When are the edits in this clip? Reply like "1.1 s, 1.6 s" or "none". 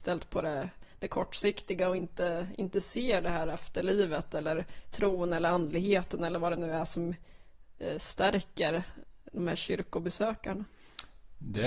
none